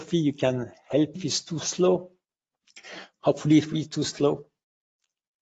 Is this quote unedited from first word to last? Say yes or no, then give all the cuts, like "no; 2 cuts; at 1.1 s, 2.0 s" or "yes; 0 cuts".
no; 2 cuts; at 1.1 s, 3.7 s